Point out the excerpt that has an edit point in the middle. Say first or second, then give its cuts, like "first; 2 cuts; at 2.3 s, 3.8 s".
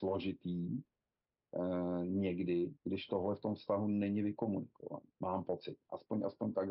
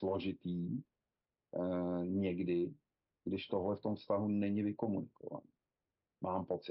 first; 2 cuts; at 2.8 s, 5.1 s